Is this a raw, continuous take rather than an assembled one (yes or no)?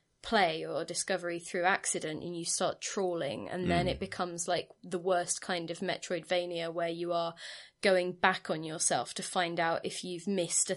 yes